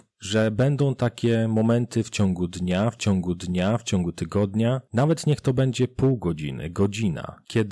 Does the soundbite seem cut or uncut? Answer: cut